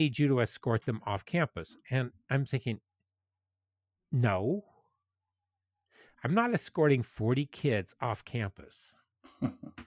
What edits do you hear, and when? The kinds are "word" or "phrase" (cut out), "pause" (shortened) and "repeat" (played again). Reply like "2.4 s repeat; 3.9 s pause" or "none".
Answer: none